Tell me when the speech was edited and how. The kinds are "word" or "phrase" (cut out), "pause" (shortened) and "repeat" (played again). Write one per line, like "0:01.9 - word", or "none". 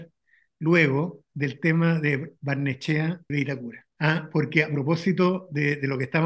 0:03.3 - word
0:03.9 - pause

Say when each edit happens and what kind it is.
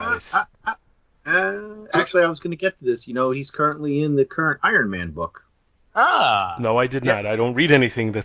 none

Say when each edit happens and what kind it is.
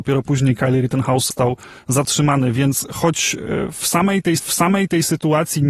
0:01.3 - word
0:04.4 - repeat

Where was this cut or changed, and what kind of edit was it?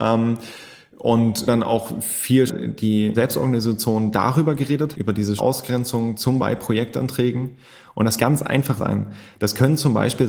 0:01.5 - word
0:02.5 - word
0:03.1 - word
0:04.9 - word
0:05.4 - word
0:06.4 - word
0:08.2 - word
0:08.8 - word

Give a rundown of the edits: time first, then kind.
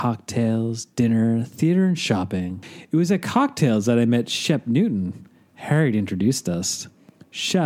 none

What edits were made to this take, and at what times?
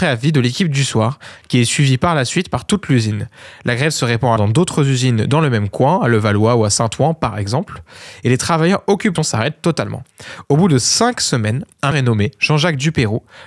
0:04.4 - word
0:09.2 - phrase
0:11.9 - word

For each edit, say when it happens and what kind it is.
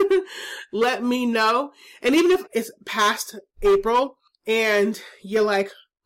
0:02.5 - word
0:04.3 - pause

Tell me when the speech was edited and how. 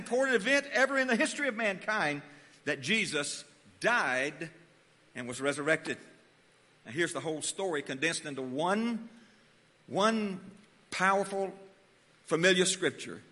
none

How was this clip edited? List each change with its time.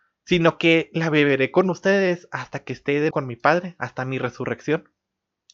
0:03.1 - word

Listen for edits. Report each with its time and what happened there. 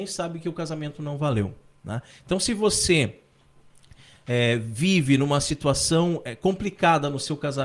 none

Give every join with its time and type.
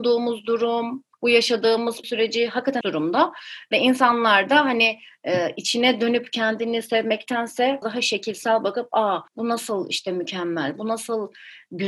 0:01.1 - pause
0:02.0 - word
0:02.8 - phrase
0:07.8 - phrase
0:09.3 - pause

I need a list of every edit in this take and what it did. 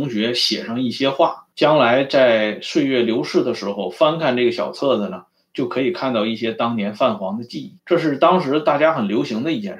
0:01.5 - pause
0:07.8 - pause

